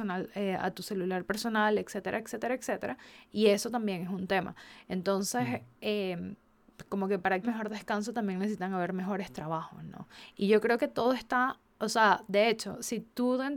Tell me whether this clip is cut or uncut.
cut